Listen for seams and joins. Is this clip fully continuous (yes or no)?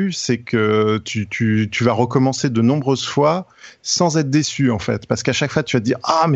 yes